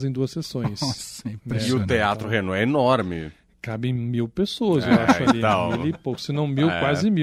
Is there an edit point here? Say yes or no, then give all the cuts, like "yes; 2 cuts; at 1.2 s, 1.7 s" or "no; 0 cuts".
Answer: no; 0 cuts